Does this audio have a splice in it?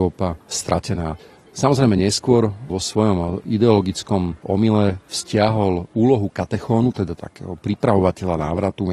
no; 0 cuts

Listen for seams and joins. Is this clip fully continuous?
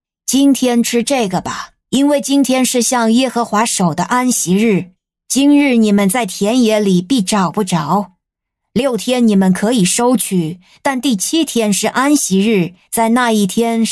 no; 1 cut; at 1.8 s

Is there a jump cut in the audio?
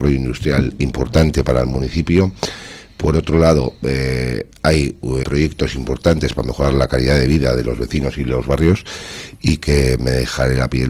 yes; 1 cut; at 5.2 s

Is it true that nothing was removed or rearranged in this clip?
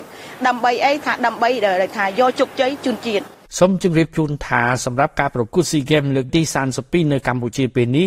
no; 1 cut; at 3.5 s

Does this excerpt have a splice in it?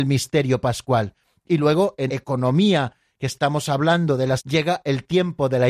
yes; 2 cuts; at 2.1 s, 4.4 s

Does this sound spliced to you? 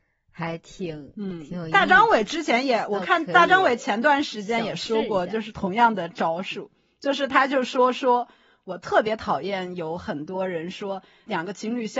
no; 0 cuts

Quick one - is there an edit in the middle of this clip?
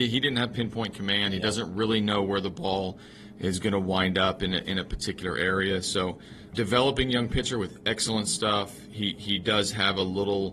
yes; 1 cut; at 6.5 s

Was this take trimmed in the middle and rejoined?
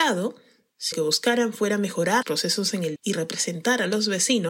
yes; 3 cuts; at 0.9 s, 2.2 s, 3.0 s

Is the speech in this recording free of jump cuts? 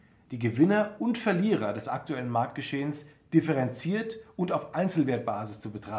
yes; 0 cuts

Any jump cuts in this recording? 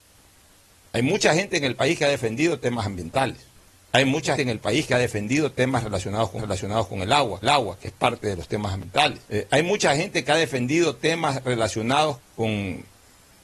yes; 6 cuts; at 3.7 s, 4.3 s, 6.4 s, 7.4 s, 9.2 s, 12.2 s

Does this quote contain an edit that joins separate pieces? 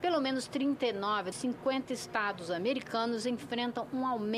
yes; 1 cut; at 1.3 s

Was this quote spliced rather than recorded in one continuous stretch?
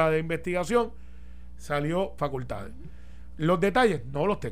yes; 1 cut; at 2.2 s

